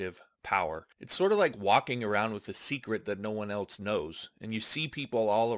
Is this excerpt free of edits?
no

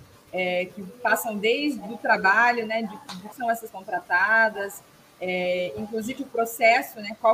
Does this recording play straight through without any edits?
no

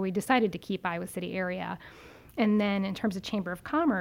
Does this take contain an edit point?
no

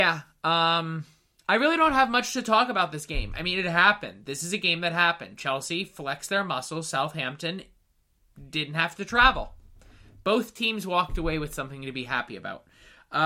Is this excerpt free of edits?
yes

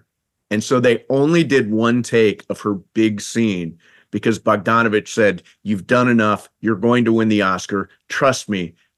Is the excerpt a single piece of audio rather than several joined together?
yes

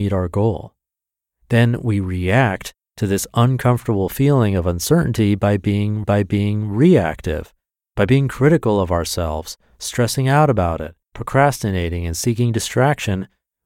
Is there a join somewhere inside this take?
yes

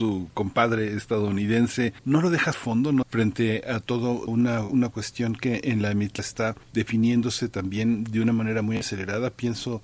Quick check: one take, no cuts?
no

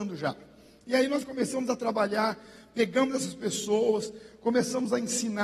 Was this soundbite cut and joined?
no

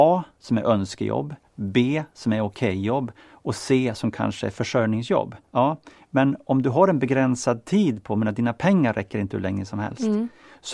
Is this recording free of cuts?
no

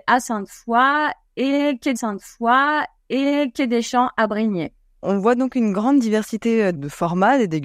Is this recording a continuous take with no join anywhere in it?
no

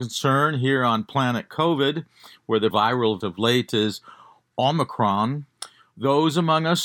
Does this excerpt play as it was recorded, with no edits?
no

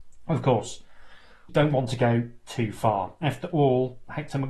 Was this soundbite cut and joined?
yes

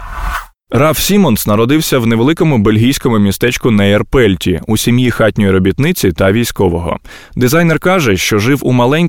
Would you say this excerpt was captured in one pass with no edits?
yes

